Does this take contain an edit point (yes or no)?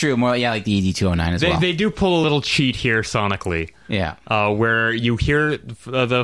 no